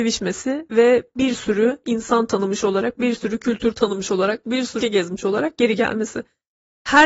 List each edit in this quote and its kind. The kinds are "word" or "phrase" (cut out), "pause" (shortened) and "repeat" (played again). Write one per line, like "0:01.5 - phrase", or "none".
0:04.8 - word